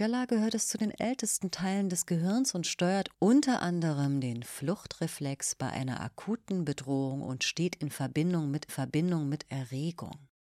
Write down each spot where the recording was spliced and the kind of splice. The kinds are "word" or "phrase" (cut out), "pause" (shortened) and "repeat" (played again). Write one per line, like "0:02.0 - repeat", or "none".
0:08.7 - repeat